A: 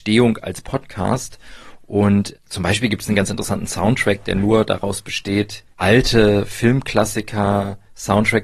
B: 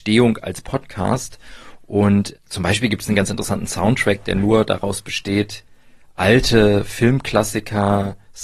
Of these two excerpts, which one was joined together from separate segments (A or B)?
A